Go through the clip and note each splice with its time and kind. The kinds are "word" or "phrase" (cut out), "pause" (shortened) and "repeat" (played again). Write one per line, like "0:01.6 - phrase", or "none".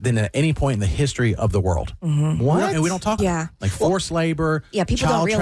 0:03.2 - word